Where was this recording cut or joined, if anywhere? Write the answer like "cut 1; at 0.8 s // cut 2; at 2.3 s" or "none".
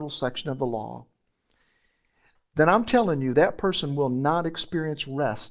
none